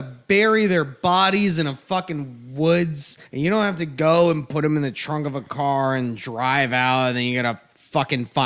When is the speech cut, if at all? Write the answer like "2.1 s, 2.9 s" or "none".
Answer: 3.3 s